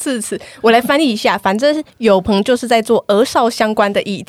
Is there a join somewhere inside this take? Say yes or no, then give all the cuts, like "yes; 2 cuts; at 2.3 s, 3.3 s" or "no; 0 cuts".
yes; 1 cut; at 1.9 s